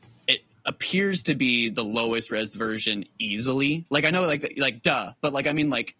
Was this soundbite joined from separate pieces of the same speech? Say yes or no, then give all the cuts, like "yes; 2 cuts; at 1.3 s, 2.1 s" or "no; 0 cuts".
no; 0 cuts